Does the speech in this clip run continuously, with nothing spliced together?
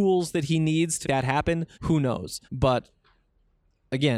no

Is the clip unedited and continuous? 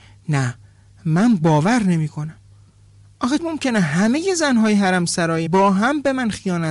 no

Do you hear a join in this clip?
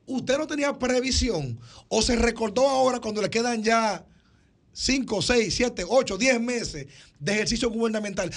no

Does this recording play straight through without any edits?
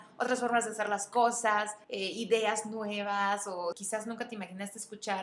no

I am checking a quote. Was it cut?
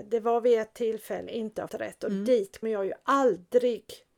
yes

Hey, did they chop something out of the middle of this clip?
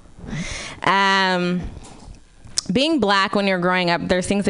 no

